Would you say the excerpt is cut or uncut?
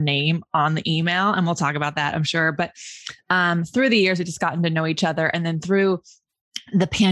uncut